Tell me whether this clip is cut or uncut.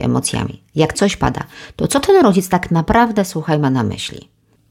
cut